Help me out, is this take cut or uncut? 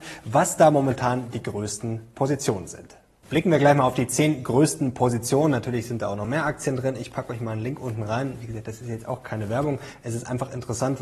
uncut